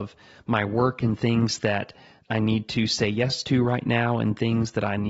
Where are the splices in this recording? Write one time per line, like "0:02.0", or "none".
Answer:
none